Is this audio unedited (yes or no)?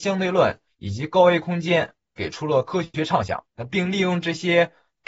no